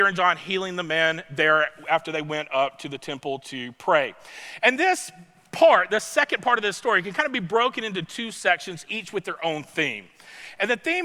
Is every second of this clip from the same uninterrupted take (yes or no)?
yes